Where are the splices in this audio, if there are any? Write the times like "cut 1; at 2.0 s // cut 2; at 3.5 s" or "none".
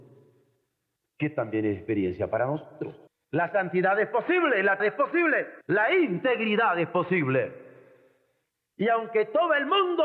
cut 1; at 3.1 s // cut 2; at 4.8 s // cut 3; at 5.6 s